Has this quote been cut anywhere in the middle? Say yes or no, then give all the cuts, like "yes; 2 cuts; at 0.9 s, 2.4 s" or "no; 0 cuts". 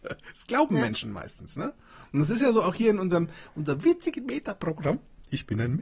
no; 0 cuts